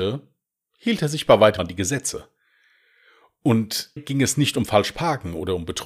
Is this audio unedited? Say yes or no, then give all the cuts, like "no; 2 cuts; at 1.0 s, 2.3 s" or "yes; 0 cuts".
no; 2 cuts; at 1.6 s, 4.0 s